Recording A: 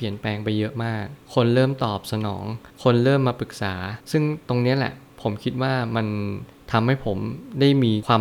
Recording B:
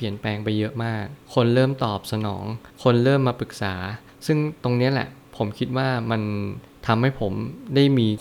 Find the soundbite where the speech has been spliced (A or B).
A